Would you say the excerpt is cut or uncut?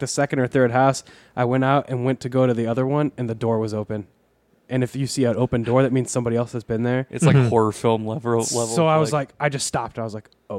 uncut